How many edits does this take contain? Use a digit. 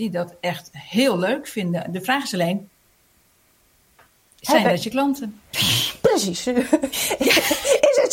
0